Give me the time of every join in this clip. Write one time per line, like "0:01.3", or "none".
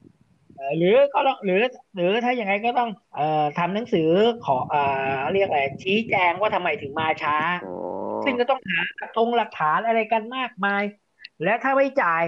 0:03.0